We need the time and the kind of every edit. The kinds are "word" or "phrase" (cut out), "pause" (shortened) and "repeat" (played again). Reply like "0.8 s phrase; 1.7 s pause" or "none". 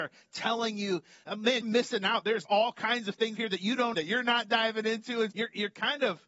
1.6 s word; 2.4 s word; 3.4 s word; 3.9 s word; 5.3 s word